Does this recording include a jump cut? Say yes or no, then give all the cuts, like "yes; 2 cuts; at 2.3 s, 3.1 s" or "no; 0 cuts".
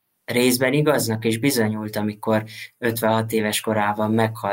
no; 0 cuts